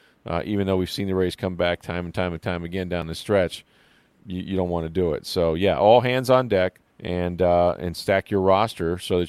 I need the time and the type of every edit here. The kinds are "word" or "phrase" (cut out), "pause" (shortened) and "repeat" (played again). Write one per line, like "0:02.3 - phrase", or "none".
0:06.9 - pause